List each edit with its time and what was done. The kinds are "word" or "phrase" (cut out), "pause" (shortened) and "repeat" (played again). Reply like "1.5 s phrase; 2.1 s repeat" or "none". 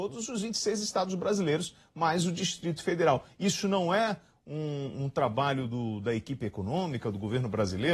none